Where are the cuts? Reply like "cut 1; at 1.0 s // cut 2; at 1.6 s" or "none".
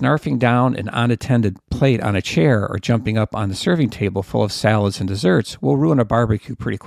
cut 1; at 1.6 s